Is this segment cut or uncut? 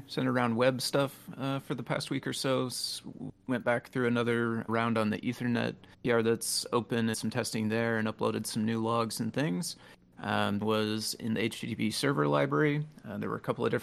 cut